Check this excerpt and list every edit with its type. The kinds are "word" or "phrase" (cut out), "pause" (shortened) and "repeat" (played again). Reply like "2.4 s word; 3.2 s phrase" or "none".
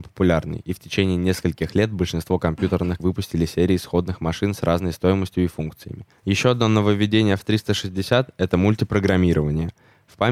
3.0 s word